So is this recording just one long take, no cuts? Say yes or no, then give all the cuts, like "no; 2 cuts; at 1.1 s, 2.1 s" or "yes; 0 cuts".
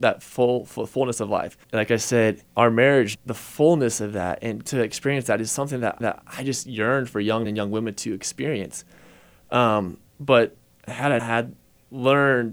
no; 8 cuts; at 1.6 s, 2.5 s, 3.1 s, 4.7 s, 6.0 s, 7.5 s, 10.1 s, 11.2 s